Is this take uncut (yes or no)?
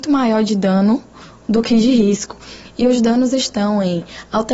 yes